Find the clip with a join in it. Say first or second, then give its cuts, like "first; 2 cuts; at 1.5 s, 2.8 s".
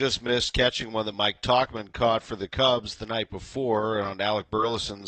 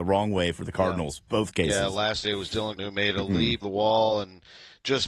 second; 3 cuts; at 2.2 s, 2.8 s, 3.6 s